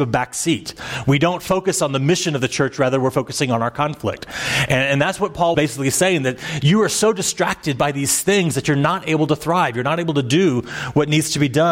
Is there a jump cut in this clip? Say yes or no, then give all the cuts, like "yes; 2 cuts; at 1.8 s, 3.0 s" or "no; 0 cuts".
yes; 1 cut; at 5.5 s